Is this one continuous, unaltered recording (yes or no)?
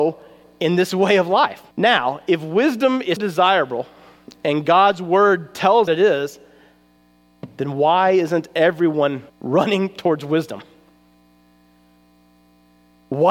no